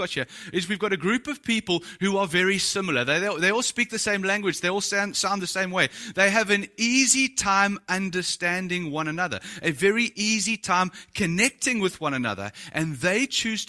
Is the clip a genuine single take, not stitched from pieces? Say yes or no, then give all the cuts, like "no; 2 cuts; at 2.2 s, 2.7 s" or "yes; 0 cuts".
yes; 0 cuts